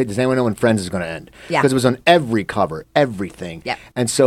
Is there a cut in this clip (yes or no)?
no